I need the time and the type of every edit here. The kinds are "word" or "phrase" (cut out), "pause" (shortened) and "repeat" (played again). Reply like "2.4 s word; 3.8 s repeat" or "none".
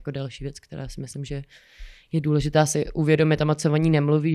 none